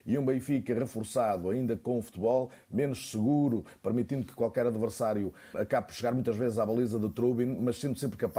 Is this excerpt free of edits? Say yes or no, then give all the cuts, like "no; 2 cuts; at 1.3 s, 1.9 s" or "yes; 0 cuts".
no; 1 cut; at 5.5 s